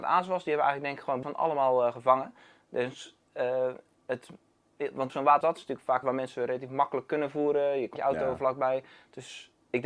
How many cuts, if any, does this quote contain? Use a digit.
5